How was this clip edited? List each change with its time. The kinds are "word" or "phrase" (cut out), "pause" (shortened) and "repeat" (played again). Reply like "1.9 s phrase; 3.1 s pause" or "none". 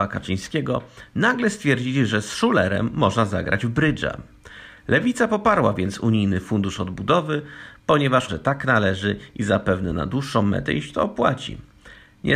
8.3 s word